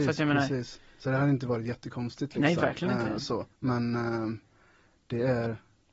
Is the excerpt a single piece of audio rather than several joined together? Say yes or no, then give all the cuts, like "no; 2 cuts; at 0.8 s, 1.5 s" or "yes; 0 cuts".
no; 2 cuts; at 0.9 s, 3.5 s